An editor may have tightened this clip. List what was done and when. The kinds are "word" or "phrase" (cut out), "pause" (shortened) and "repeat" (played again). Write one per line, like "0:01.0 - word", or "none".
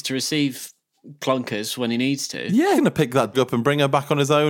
0:02.8 - word
0:03.3 - word

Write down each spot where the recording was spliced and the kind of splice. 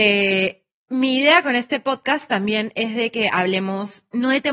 none

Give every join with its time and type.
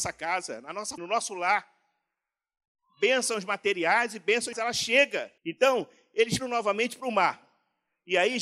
0:01.0 - word
0:04.5 - word
0:05.4 - pause
0:06.4 - word

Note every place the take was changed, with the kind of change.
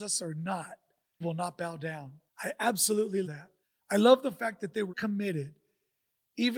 0:01.2 - word
0:02.3 - pause
0:03.2 - word
0:03.6 - pause
0:04.9 - word

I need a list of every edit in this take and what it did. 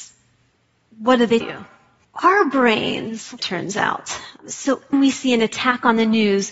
0:01.4 - word
0:03.4 - phrase
0:04.9 - word

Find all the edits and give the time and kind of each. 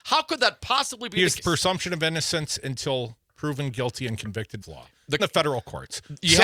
0:01.4 - word
0:04.6 - phrase
0:05.2 - word

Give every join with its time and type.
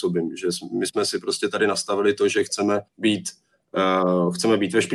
0:02.9 - pause

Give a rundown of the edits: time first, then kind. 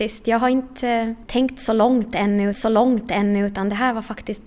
0:02.5 - repeat

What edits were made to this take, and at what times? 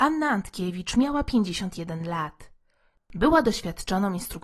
none

